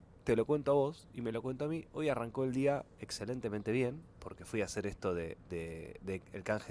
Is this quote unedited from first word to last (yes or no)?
yes